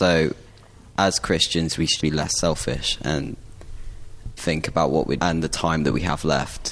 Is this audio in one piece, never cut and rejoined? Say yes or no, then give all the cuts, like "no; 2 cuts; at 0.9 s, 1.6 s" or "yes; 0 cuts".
no; 3 cuts; at 2.0 s, 4.4 s, 5.2 s